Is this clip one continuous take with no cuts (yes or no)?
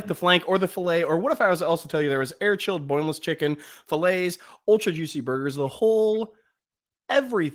yes